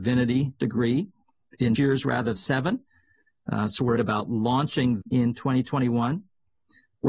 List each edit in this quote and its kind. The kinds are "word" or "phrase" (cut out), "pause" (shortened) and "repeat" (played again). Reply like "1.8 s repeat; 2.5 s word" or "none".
1.8 s word; 2.4 s word; 4.0 s word; 5.0 s word